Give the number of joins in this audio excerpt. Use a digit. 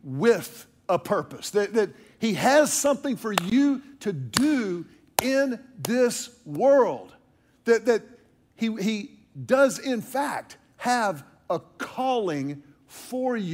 0